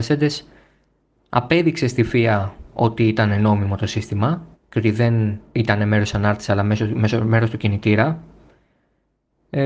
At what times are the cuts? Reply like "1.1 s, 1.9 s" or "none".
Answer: 4.5 s